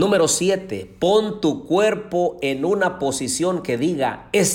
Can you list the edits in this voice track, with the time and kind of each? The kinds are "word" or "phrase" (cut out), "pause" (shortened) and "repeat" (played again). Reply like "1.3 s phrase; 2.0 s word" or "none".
none